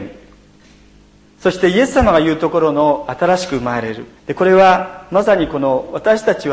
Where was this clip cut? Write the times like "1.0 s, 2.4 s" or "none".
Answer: 4.2 s